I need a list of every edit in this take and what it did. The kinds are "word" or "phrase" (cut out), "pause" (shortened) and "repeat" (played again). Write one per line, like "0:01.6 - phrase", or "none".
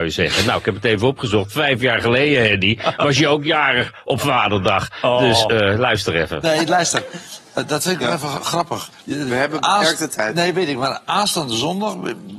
0:09.0 - pause